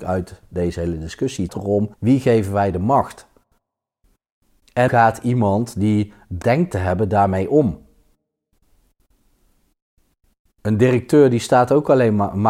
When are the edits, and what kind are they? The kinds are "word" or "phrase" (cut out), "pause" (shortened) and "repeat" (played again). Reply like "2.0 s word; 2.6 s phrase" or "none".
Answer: 1.5 s word; 1.9 s pause; 4.9 s word; 6.4 s word